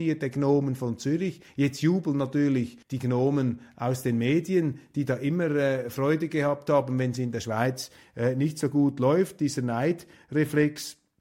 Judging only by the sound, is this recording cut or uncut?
cut